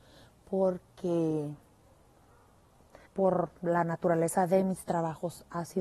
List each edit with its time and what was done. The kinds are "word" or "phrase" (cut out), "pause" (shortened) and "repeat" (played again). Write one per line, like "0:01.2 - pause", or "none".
0:03.1 - pause